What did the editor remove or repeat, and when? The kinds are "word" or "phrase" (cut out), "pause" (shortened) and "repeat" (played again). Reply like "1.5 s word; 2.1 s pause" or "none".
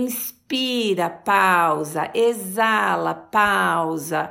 none